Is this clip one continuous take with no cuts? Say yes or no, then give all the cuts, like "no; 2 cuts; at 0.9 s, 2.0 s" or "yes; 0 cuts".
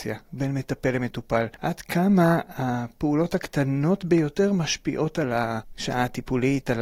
yes; 0 cuts